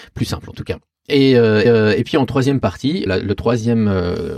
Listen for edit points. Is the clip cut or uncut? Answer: cut